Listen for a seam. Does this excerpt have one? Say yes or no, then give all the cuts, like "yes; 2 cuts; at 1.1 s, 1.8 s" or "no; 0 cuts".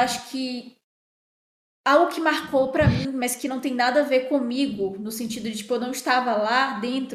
no; 0 cuts